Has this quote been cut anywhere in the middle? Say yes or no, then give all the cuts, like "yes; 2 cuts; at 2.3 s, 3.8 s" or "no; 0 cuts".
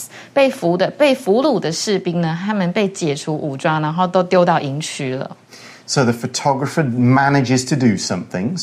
no; 0 cuts